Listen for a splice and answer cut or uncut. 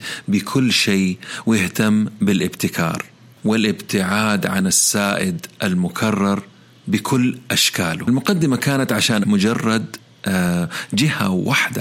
cut